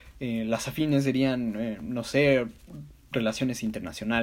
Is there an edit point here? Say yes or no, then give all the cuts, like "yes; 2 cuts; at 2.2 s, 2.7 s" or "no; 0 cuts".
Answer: no; 0 cuts